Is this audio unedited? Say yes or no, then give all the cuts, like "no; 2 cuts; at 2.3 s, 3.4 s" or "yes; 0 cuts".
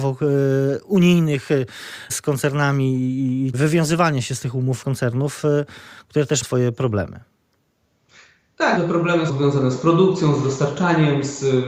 no; 6 cuts; at 2.1 s, 3.5 s, 4.8 s, 6.4 s, 8.8 s, 9.3 s